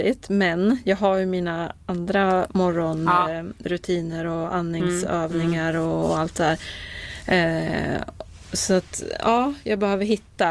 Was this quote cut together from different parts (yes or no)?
no